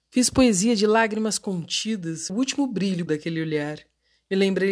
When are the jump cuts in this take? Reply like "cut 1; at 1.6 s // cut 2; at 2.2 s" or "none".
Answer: cut 1; at 2.3 s // cut 2; at 3.1 s

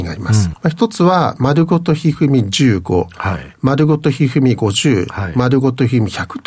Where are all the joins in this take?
none

